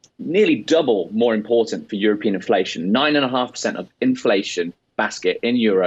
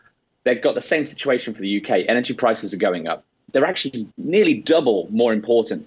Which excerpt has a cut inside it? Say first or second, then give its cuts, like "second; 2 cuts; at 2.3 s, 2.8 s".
second; 1 cut; at 4.1 s